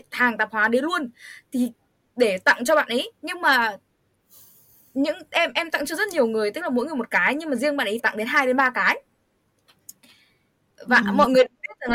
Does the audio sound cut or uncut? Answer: cut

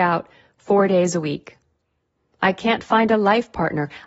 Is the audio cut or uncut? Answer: uncut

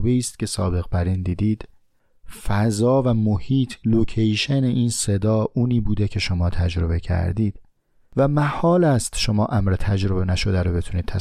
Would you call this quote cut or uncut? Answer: uncut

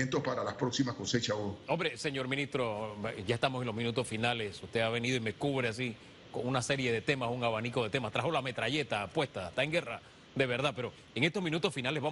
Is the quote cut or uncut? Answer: uncut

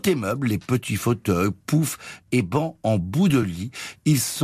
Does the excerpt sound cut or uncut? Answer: uncut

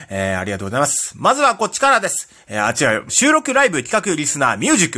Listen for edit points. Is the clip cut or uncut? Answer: cut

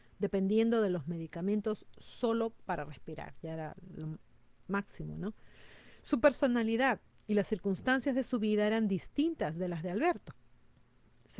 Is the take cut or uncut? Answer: uncut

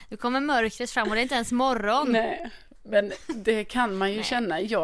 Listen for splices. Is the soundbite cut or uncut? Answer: uncut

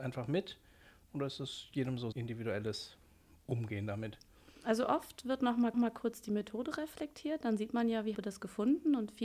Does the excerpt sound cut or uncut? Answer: cut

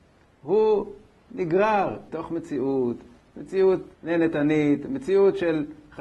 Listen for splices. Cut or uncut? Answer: cut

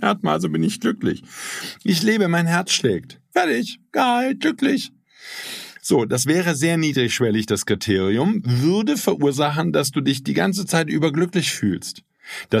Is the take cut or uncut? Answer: uncut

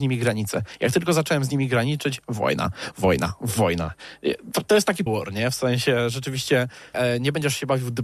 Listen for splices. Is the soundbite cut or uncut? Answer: cut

